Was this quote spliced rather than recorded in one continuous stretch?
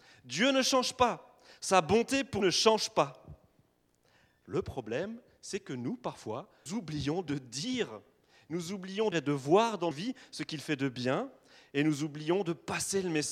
yes; 4 cuts; at 2.4 s, 6.7 s, 9.1 s, 9.9 s

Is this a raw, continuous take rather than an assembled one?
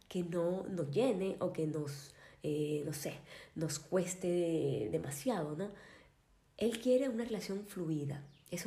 yes; 0 cuts

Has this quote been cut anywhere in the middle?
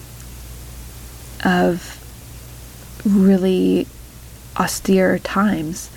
no; 0 cuts

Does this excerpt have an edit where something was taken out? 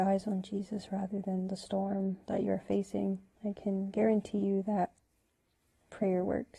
yes; 2 cuts; at 2.2 s, 3.3 s

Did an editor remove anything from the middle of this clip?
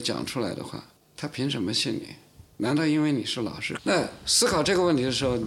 yes; 1 cut; at 1.0 s

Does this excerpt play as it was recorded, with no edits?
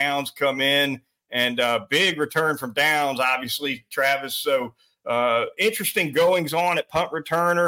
yes; 0 cuts

